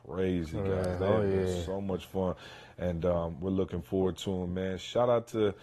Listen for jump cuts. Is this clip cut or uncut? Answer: uncut